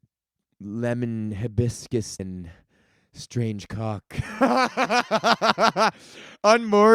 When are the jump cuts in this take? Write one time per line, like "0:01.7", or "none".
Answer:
0:02.2